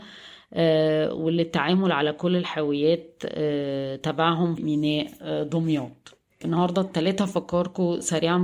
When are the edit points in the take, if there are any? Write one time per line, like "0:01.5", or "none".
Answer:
0:04.6
0:06.4